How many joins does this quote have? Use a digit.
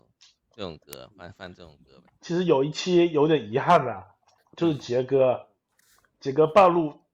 1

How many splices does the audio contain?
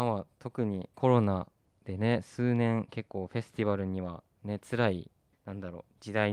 2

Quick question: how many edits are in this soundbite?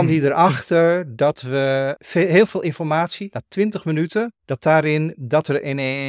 1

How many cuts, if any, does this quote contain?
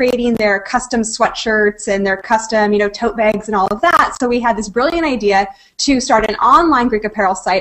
0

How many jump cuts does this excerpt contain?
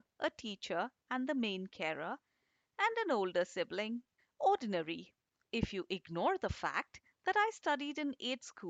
1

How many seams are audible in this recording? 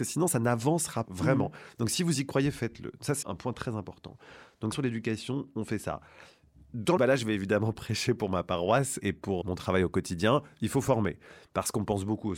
6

